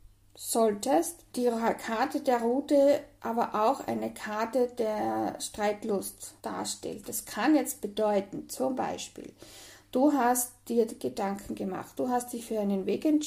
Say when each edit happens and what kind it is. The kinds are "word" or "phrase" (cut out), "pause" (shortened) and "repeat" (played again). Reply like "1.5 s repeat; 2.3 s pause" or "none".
1.3 s pause; 6.4 s pause